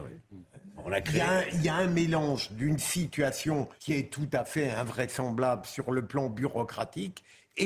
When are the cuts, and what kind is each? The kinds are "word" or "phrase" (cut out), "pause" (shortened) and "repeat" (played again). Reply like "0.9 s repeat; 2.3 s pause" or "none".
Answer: 3.8 s pause